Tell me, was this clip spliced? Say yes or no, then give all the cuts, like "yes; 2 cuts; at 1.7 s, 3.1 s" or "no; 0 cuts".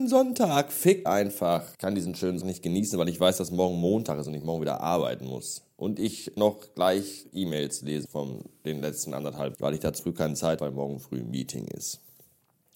yes; 9 cuts; at 1.0 s, 1.7 s, 2.4 s, 6.4 s, 7.2 s, 8.1 s, 9.5 s, 10.0 s, 10.6 s